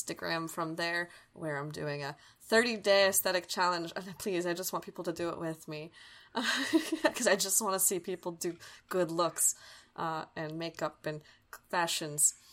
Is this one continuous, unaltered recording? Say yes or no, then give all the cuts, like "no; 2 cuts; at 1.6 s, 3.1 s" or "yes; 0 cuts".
yes; 0 cuts